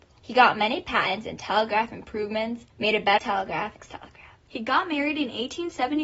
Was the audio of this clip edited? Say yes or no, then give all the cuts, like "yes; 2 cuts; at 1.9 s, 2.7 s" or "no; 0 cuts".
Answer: yes; 3 cuts; at 2.7 s, 3.2 s, 3.8 s